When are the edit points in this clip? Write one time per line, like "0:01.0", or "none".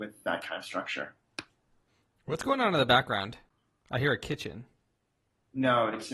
none